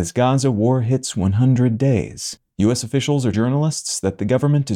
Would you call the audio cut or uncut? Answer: cut